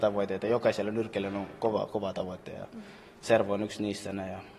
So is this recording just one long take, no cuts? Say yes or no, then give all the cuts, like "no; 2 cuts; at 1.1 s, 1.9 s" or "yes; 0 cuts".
yes; 0 cuts